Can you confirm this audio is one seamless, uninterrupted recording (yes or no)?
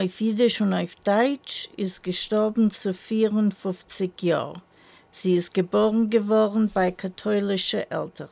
yes